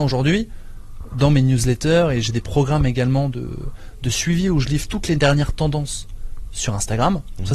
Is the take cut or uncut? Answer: uncut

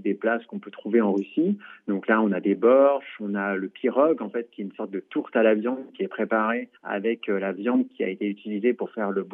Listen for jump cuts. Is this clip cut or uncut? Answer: cut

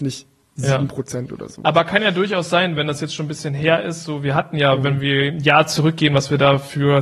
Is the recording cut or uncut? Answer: uncut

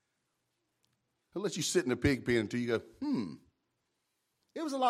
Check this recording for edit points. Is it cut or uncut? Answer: uncut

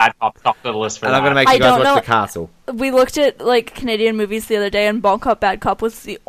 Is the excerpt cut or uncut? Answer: uncut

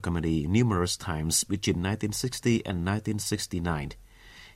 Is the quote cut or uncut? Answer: uncut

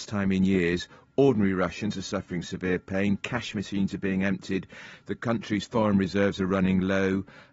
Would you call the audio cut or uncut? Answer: uncut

